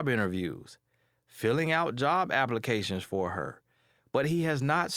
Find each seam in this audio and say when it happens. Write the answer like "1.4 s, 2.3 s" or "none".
none